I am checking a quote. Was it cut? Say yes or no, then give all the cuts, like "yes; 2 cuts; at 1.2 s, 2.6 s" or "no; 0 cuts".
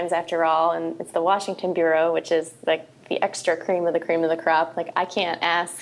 no; 0 cuts